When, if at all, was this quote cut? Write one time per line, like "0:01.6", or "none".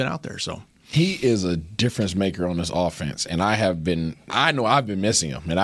0:04.3